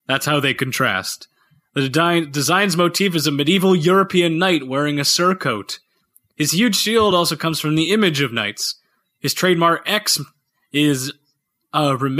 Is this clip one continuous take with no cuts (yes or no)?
yes